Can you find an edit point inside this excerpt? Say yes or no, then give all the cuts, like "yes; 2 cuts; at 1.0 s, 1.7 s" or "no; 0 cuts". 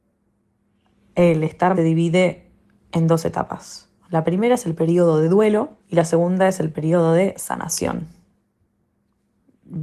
yes; 3 cuts; at 1.7 s, 4.0 s, 5.8 s